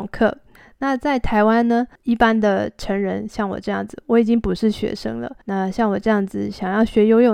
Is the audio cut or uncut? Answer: cut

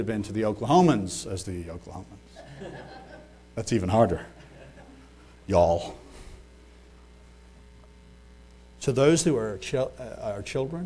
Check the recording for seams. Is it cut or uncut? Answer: uncut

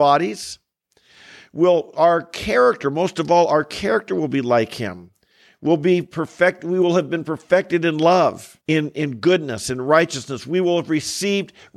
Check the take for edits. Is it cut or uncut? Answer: cut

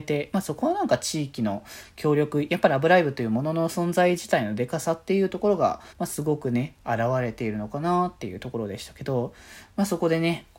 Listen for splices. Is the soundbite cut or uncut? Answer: cut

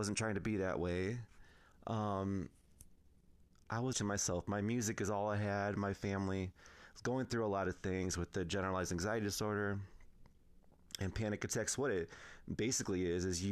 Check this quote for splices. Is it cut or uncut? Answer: cut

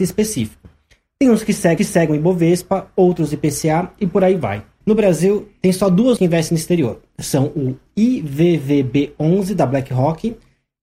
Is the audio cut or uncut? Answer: cut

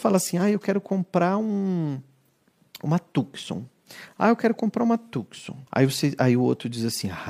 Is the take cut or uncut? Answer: cut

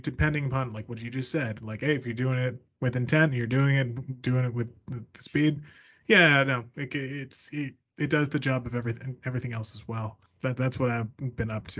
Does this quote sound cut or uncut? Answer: uncut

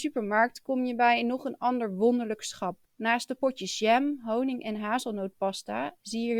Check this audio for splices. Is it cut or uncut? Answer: cut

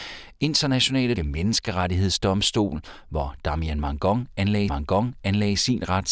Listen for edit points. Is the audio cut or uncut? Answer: cut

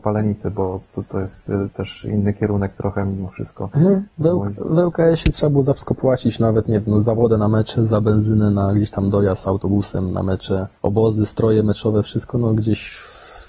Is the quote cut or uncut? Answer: cut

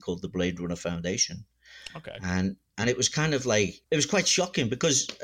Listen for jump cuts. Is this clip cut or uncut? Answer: cut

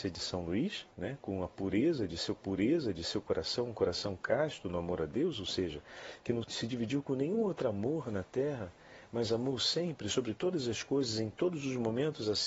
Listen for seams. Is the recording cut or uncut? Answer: cut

